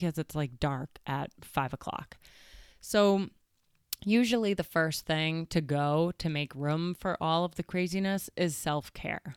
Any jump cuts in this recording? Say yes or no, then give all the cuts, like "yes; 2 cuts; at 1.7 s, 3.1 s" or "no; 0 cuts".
no; 0 cuts